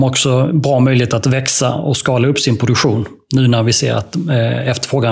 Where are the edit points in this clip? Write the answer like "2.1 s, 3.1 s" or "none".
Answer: none